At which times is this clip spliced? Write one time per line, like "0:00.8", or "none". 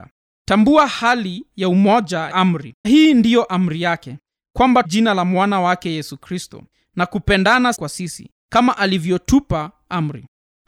0:02.3
0:02.8
0:04.8
0:07.7